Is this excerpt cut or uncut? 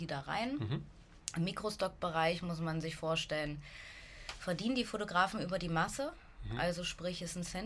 uncut